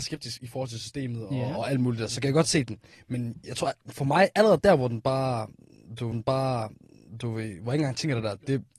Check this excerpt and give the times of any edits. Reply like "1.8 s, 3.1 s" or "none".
6.1 s